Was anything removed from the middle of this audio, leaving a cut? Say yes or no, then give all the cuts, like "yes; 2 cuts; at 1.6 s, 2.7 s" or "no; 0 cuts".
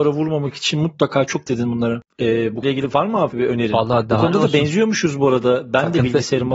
yes; 3 cuts; at 1.5 s, 2.6 s, 3.3 s